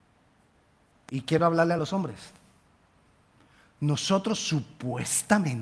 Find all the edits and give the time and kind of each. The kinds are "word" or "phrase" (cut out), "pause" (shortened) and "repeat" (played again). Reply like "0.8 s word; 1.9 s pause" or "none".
none

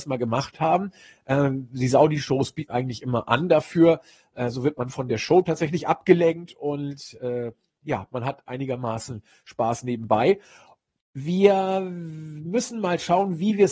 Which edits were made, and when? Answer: 2.7 s word

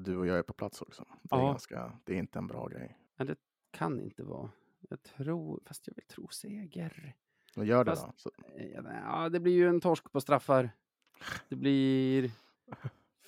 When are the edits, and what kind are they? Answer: 1.2 s pause; 3.1 s pause; 6.0 s word

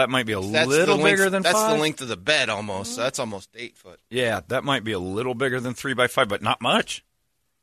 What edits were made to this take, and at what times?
none

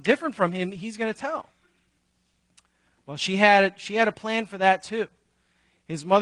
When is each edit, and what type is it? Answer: none

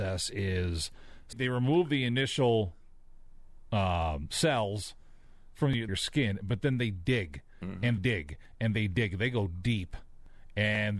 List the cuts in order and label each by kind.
1.3 s word; 5.9 s phrase; 8.0 s word

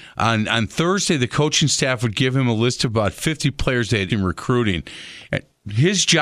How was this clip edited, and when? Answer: 4.1 s word

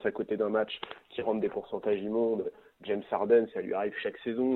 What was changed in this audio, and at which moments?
none

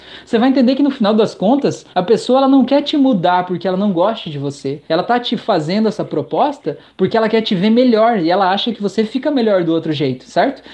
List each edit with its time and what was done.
1.9 s pause; 4.9 s pause

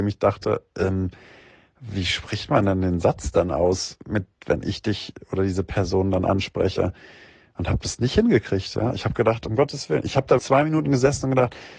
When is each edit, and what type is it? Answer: 4.3 s pause; 10.4 s word

